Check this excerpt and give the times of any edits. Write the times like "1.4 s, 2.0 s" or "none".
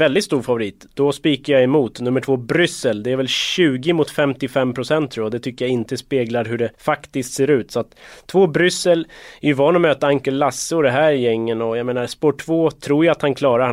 6.7 s